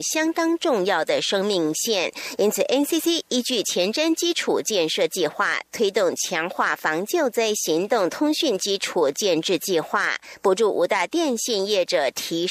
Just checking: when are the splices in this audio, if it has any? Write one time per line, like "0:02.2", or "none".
none